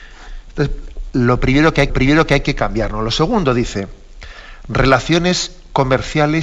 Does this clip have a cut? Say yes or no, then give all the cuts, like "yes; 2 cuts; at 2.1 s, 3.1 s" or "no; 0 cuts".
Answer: yes; 1 cut; at 1.9 s